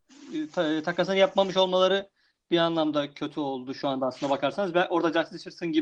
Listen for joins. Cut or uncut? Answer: uncut